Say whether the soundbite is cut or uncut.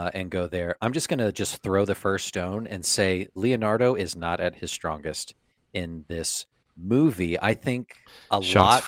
uncut